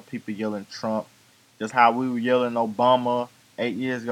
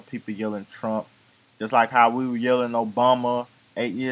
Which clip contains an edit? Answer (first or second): first